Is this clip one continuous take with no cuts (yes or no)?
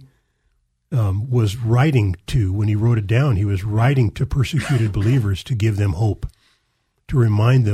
yes